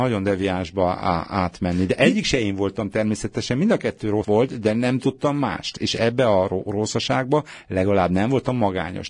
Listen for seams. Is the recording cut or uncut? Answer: cut